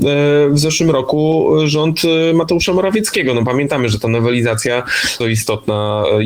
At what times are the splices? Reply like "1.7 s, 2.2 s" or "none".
5.2 s